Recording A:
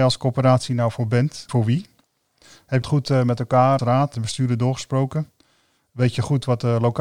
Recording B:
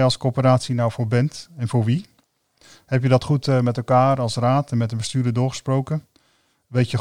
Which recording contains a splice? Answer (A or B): A